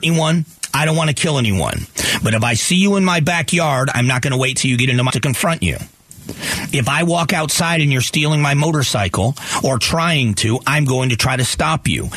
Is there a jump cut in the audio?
yes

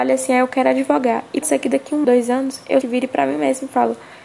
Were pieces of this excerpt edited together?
yes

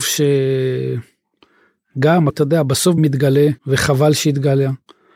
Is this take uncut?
no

